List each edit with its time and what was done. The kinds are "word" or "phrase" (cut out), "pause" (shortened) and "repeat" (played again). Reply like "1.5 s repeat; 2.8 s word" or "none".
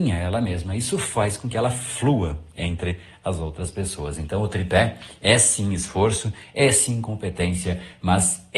none